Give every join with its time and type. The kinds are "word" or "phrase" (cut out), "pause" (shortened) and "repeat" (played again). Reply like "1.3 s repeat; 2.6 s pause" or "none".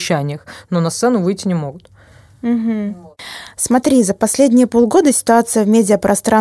none